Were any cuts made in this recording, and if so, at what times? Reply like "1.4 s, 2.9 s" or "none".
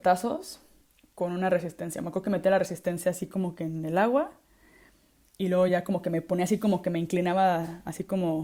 none